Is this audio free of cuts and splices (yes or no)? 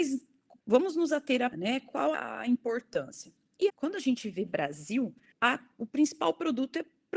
no